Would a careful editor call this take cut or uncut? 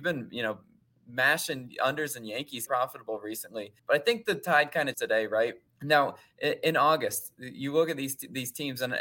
cut